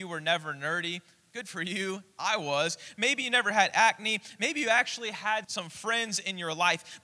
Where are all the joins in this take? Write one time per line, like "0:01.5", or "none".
0:05.4